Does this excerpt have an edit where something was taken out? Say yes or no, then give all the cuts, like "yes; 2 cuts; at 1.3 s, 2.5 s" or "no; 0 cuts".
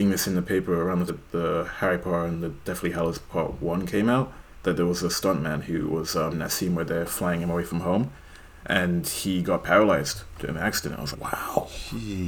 yes; 3 cuts; at 1.1 s, 6.3 s, 11.1 s